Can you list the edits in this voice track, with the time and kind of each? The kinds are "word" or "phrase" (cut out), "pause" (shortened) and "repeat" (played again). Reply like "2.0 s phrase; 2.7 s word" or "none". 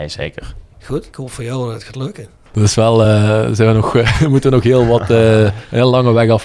none